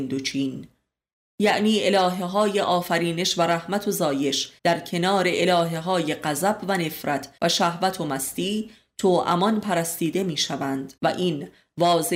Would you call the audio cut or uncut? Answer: cut